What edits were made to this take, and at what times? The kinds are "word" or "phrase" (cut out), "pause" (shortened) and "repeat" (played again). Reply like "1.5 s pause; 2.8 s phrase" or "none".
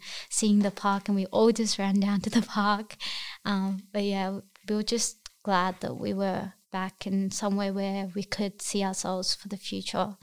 6.6 s pause